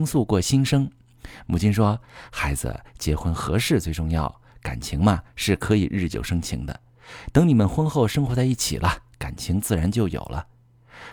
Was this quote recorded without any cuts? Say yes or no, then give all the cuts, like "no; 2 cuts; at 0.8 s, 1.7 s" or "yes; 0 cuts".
yes; 0 cuts